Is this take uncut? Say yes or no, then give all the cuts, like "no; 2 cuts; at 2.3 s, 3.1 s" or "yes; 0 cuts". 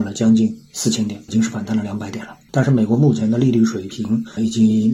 no; 1 cut; at 1.3 s